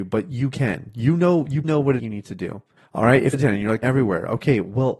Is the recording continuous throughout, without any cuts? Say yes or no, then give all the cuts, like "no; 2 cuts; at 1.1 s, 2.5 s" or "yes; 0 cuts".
no; 5 cuts; at 1.6 s, 2.0 s, 2.8 s, 3.3 s, 3.8 s